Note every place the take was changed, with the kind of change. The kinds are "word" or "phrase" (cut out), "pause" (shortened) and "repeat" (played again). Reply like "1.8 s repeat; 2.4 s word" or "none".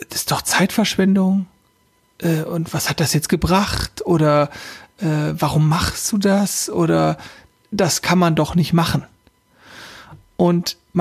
none